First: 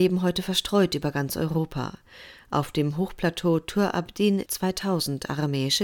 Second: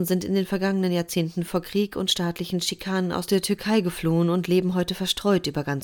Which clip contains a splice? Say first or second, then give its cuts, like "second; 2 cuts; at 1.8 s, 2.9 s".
first; 1 cut; at 4.5 s